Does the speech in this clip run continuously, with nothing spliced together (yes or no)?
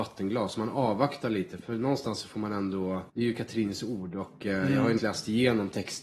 no